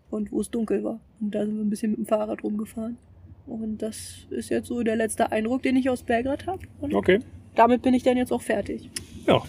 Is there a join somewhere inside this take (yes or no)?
yes